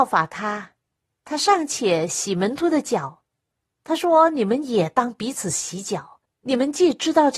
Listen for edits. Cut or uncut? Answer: cut